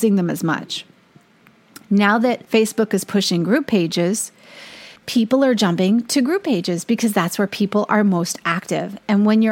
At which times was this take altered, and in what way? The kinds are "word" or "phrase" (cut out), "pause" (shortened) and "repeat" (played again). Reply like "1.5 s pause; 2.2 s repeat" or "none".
2.4 s pause; 5.0 s pause